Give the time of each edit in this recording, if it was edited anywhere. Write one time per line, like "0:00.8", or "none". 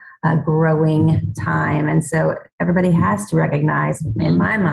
none